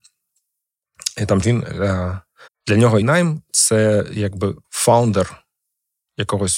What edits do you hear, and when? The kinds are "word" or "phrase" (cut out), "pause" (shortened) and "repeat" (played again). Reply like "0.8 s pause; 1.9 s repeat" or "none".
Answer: 1.4 s phrase; 2.5 s pause; 3.0 s word; 4.6 s pause